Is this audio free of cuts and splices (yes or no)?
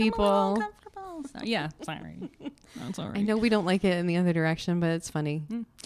yes